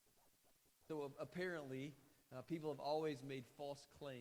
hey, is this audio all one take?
yes; 0 cuts

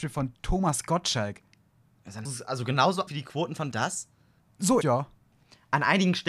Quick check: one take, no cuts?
no; 4 cuts; at 2.2 s, 3.1 s, 3.7 s, 4.8 s

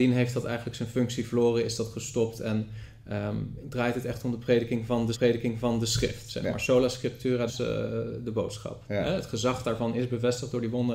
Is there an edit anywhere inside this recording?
yes; 3 cuts; at 3.6 s, 5.1 s, 7.5 s

